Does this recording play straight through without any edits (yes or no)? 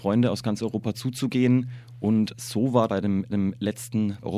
no